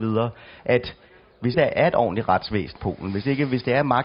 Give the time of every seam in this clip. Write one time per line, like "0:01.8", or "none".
0:01.5
0:02.8